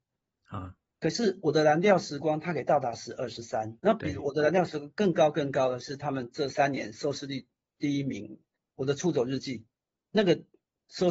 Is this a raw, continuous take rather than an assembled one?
no; 2 cuts; at 3.8 s, 9.9 s

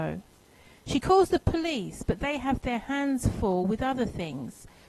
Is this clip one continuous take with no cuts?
yes; 0 cuts

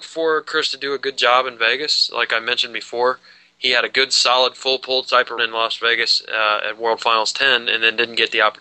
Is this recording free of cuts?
no; 1 cut; at 5.4 s

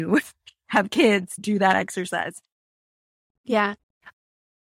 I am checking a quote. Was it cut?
yes; 1 cut; at 1.4 s

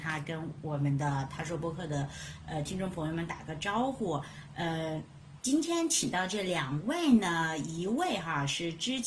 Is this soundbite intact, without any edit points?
no; 1 cut; at 5.4 s

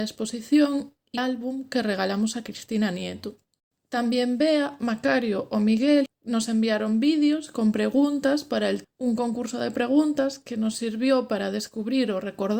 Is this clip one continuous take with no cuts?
no; 4 cuts; at 1.2 s, 3.7 s, 6.1 s, 8.8 s

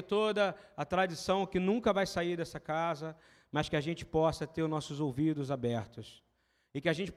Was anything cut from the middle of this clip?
no; 0 cuts

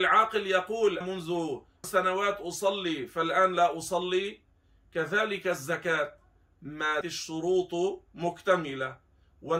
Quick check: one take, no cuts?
no; 3 cuts; at 1.0 s, 1.8 s, 7.0 s

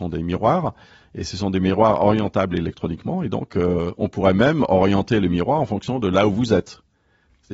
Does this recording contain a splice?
no; 0 cuts

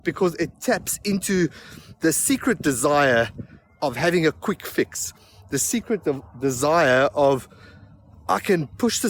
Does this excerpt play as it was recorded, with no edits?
yes; 0 cuts

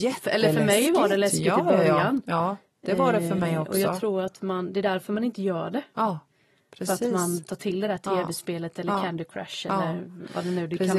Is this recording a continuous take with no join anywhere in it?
yes; 0 cuts

